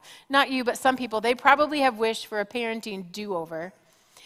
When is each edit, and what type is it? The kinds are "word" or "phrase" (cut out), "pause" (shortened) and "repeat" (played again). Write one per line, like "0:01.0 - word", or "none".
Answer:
none